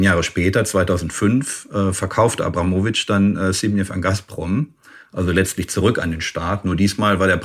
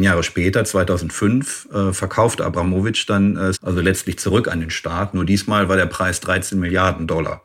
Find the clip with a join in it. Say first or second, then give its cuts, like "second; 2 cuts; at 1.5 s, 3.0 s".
second; 1 cut; at 3.5 s